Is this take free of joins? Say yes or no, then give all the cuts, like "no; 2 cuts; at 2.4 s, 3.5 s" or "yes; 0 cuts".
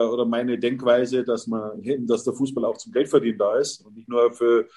yes; 0 cuts